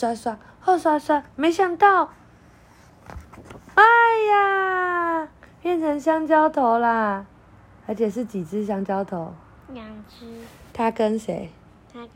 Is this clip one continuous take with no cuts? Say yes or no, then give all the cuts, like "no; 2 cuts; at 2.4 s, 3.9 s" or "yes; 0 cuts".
no; 2 cuts; at 5.4 s, 9.5 s